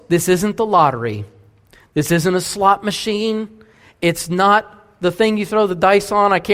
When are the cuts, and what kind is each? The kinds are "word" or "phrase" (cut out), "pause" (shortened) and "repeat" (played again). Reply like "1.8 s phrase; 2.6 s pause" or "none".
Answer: none